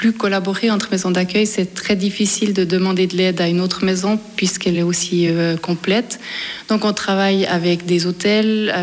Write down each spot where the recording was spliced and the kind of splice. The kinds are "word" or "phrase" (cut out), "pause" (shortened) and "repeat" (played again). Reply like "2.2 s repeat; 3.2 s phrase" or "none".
none